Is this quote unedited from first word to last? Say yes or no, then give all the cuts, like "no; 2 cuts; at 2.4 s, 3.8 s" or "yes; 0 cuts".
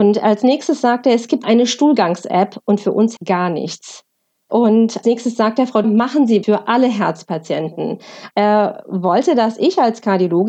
no; 5 cuts; at 1.4 s, 3.2 s, 5.0 s, 5.8 s, 6.4 s